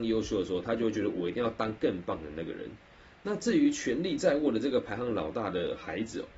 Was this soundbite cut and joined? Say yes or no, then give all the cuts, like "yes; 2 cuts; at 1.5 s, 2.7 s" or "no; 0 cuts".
no; 0 cuts